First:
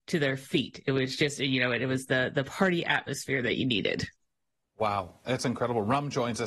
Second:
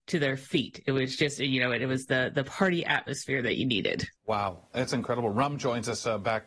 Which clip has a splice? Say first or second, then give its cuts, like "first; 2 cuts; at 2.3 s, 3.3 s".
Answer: second; 1 cut; at 4.2 s